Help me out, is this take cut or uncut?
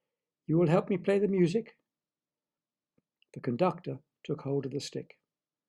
uncut